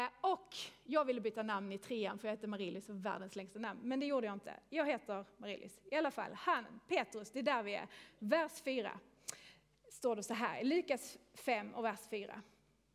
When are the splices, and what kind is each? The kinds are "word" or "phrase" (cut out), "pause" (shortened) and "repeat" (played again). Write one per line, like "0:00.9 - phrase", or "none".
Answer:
none

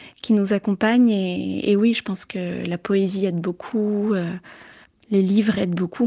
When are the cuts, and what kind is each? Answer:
0:04.8 - pause

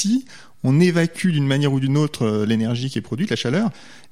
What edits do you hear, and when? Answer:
none

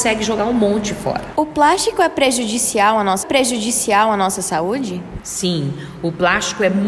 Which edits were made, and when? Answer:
0:03.2 - repeat

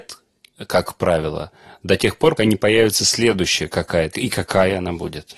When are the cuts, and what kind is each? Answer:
0:02.4 - word
0:04.1 - word

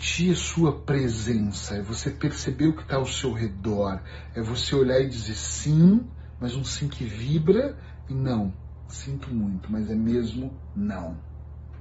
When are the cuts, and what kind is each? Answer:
none

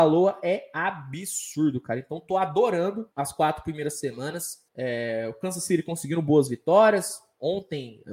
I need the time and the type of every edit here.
0:03.1 - pause
0:04.7 - pause

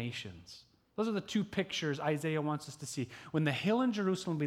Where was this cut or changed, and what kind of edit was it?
none

